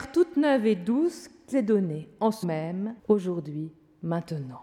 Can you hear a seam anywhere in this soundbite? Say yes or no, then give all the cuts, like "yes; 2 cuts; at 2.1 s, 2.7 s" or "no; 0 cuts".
yes; 3 cuts; at 1.5 s, 2.4 s, 3.0 s